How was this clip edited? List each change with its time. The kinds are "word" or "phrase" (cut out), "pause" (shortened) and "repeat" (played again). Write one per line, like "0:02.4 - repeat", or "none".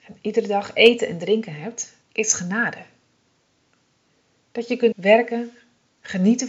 0:02.0 - pause
0:04.9 - word